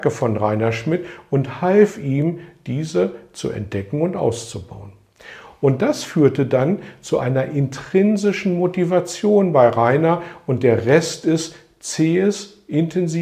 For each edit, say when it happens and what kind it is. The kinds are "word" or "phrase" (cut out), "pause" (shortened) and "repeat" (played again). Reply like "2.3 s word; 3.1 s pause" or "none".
none